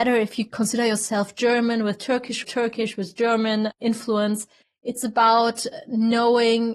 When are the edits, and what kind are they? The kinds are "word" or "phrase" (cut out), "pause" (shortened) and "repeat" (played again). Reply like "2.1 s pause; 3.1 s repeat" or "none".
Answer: 2.4 s phrase; 4.6 s pause